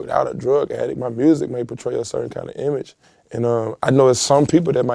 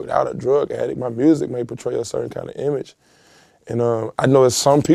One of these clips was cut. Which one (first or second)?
first